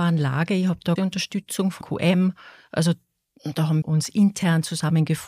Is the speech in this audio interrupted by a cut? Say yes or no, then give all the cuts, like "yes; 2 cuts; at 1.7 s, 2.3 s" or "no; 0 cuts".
yes; 3 cuts; at 1.0 s, 1.8 s, 3.8 s